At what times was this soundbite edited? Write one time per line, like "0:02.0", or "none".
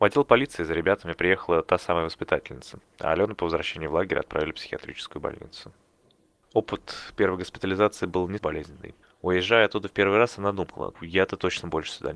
0:08.4
0:10.9